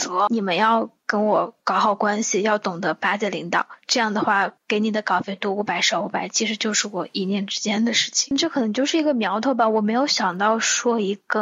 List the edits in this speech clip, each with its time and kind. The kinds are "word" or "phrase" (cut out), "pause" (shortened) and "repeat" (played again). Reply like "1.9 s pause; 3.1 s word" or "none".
4.6 s pause